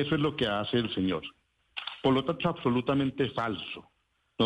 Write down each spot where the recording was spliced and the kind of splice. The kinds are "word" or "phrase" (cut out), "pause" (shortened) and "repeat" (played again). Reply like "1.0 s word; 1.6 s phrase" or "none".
2.4 s word